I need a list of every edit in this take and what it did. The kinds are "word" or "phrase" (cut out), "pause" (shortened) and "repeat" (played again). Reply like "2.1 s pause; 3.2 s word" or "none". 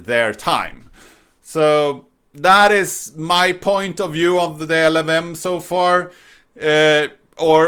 none